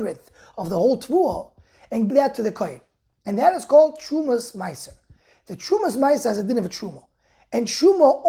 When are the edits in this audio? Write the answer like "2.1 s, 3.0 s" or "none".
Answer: 2.1 s